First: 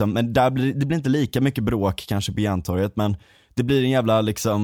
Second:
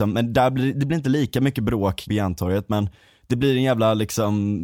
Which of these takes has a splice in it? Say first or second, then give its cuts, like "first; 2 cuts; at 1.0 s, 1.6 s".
second; 1 cut; at 2.1 s